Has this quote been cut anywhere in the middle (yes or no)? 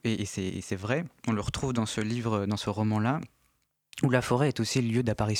no